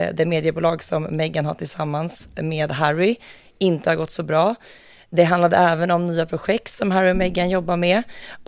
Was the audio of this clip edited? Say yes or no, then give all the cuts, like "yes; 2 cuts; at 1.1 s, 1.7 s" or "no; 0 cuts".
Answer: no; 0 cuts